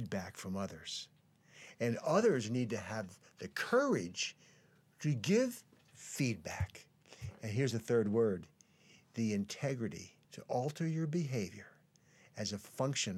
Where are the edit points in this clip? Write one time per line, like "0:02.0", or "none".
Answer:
0:10.2